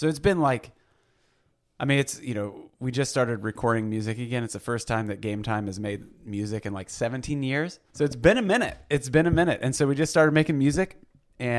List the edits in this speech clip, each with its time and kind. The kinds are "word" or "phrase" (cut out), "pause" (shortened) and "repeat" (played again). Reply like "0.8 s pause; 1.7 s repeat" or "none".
7.9 s pause